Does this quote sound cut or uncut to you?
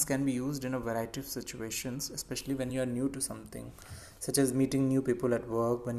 uncut